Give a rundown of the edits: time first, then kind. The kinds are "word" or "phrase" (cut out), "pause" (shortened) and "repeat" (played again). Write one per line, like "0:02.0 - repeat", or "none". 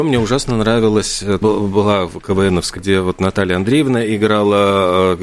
0:01.4 - word
0:02.8 - word